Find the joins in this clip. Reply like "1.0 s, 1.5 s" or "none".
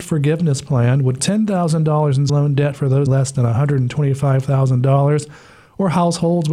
1.2 s, 2.3 s, 3.1 s